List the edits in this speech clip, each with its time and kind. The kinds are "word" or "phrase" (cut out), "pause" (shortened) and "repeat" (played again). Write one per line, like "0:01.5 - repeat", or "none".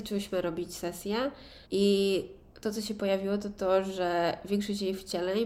0:01.7 - pause